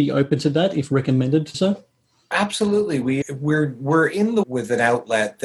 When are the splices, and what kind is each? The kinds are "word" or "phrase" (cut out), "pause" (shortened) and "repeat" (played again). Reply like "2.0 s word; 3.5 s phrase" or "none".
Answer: 1.5 s word; 3.2 s word; 4.4 s phrase